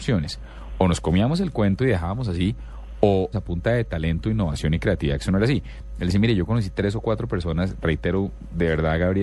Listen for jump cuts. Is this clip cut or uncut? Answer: cut